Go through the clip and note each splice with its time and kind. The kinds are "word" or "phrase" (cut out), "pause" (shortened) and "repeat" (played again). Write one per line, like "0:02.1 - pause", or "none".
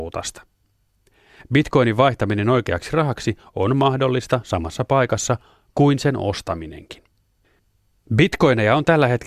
none